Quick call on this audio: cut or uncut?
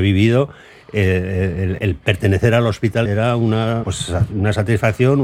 cut